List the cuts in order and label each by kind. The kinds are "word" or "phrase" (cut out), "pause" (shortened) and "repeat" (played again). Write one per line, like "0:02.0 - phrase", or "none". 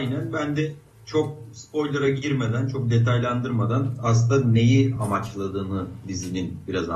none

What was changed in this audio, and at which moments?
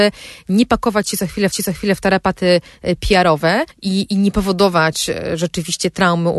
0:01.5 - repeat
0:03.7 - pause

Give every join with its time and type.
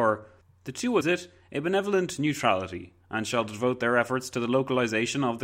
0:01.0 - phrase

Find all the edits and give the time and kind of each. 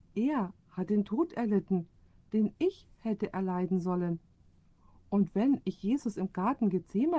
none

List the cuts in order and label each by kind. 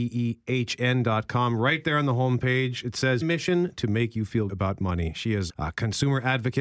0:03.2 - word
0:04.5 - word
0:05.5 - phrase

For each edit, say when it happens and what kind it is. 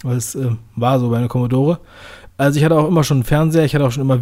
none

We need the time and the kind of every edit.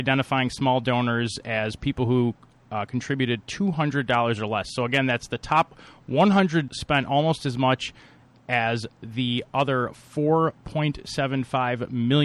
0:06.7 - word

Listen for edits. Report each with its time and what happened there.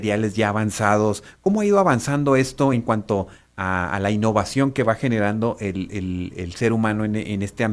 none

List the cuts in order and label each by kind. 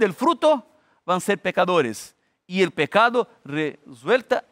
none

